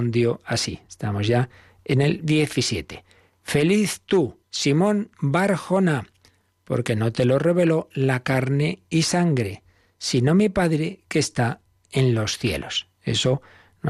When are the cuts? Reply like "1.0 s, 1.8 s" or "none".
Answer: 4.4 s